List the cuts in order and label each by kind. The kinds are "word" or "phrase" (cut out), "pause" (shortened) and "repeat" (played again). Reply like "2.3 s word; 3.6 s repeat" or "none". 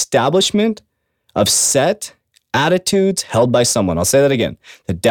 none